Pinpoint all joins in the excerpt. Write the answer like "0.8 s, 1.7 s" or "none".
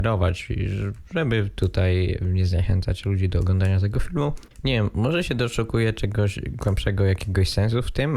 4.5 s